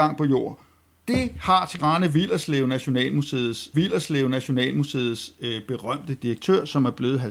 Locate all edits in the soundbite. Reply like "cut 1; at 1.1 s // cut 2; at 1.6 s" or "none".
cut 1; at 1.8 s // cut 2; at 3.7 s